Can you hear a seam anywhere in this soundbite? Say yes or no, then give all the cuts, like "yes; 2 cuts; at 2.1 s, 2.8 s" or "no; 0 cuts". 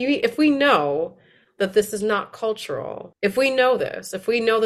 no; 0 cuts